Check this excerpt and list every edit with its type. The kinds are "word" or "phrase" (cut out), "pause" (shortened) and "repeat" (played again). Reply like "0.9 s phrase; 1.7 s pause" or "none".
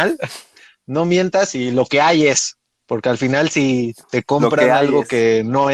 2.7 s pause; 4.0 s pause